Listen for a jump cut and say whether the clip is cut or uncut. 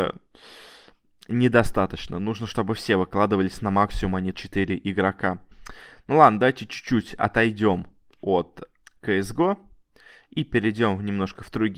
cut